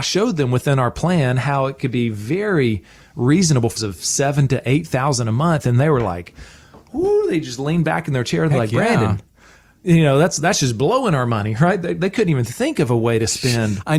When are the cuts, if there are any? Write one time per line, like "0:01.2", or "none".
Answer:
0:03.8